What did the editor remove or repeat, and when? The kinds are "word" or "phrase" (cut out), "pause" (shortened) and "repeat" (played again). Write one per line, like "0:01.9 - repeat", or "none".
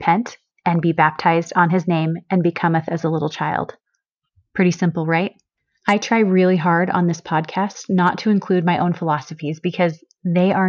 none